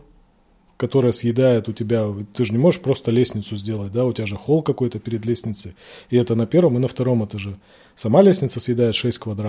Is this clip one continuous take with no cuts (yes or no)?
yes